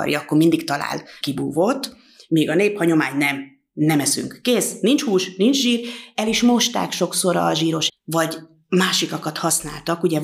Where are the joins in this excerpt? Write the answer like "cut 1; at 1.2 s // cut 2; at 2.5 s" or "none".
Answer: cut 1; at 1.2 s // cut 2; at 7.9 s